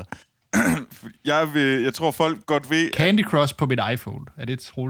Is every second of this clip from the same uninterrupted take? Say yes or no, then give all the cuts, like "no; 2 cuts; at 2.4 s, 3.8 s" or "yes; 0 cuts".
yes; 0 cuts